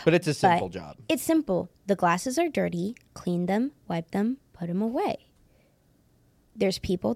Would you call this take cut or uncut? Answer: uncut